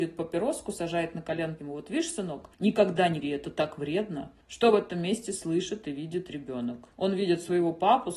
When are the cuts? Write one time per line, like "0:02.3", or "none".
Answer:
0:01.6
0:02.5
0:03.2
0:04.4
0:06.9